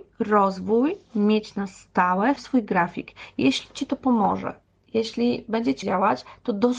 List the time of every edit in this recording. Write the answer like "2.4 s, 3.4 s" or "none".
2.4 s, 5.8 s